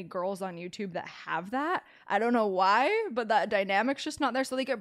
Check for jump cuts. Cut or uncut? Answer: uncut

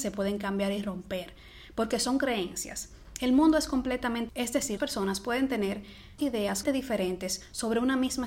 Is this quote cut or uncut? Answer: cut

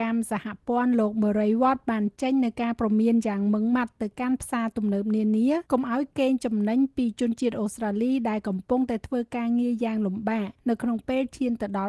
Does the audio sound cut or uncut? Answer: cut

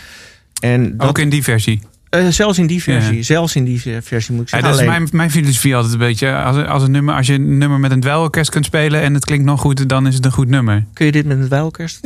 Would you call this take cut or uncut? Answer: uncut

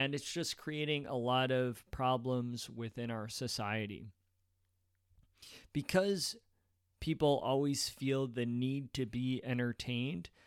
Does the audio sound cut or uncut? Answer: uncut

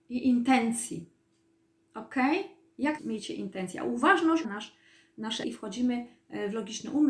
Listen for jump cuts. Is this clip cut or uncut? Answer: cut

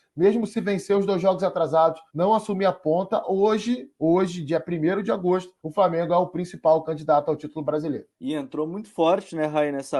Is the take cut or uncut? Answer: cut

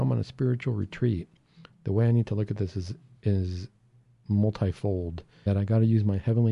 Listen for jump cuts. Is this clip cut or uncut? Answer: cut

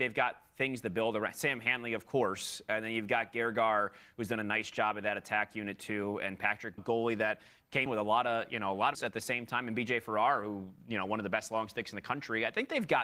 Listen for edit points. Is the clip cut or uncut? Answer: cut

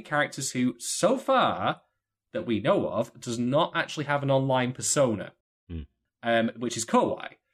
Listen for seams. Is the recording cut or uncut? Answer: uncut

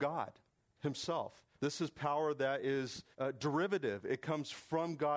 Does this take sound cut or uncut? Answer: cut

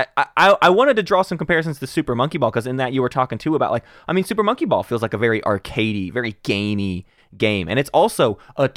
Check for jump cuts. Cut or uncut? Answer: uncut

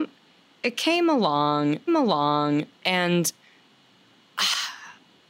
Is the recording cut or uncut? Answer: cut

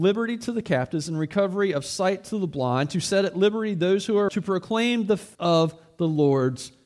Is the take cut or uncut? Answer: cut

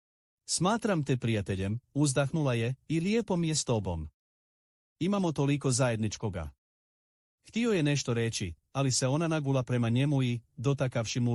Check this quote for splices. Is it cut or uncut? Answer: uncut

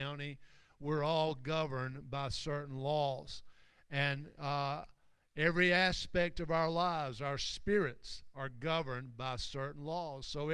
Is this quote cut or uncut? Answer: uncut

